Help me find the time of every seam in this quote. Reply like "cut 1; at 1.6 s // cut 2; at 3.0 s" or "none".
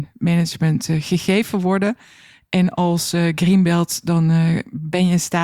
none